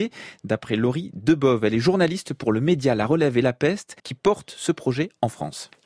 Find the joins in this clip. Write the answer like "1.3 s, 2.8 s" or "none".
4.0 s